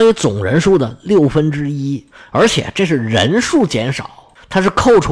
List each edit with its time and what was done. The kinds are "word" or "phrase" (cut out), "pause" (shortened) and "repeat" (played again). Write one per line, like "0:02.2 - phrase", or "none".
none